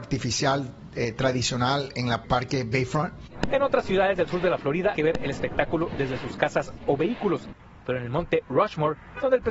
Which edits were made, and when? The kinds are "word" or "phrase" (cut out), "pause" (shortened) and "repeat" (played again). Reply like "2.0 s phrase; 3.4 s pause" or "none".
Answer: 2.2 s word; 4.9 s phrase